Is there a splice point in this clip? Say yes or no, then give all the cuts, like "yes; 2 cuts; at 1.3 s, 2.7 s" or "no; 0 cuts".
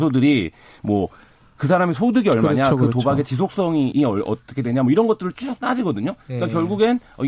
yes; 1 cut; at 3.9 s